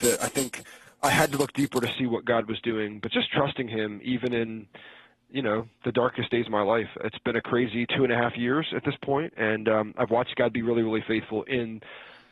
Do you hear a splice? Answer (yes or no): no